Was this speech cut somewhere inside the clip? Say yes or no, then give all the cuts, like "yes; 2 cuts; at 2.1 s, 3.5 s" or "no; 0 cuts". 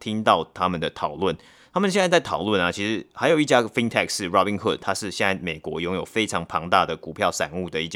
no; 0 cuts